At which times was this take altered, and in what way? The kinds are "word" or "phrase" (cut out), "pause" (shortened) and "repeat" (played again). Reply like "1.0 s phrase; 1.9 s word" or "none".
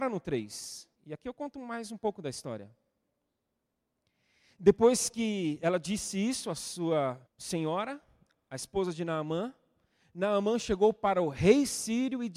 1.0 s pause; 7.3 s pause